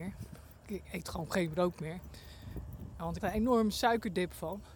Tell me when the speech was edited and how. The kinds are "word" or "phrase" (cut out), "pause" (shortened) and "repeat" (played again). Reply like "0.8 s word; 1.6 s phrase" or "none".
3.2 s word

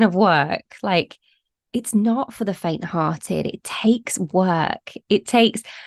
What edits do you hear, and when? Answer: none

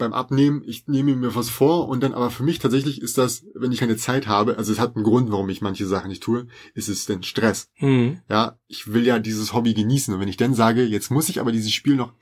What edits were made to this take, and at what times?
3.8 s word

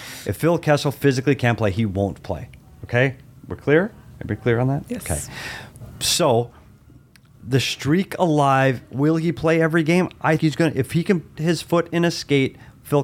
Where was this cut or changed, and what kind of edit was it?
10.4 s word; 11.4 s word

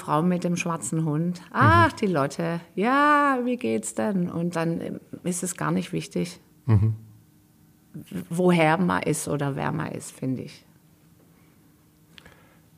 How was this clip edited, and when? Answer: none

